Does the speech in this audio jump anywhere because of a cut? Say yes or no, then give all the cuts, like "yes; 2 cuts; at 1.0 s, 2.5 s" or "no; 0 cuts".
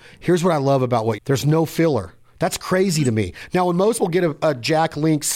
yes; 2 cuts; at 1.2 s, 4.0 s